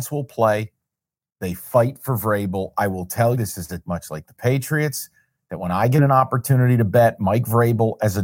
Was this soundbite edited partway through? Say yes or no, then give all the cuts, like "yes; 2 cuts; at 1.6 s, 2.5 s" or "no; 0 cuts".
yes; 2 cuts; at 3.3 s, 3.8 s